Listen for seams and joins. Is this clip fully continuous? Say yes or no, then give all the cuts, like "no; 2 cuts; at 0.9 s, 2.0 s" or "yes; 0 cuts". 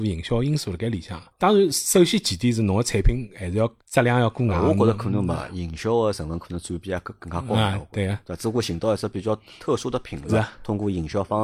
no; 3 cuts; at 1.3 s, 3.8 s, 10.3 s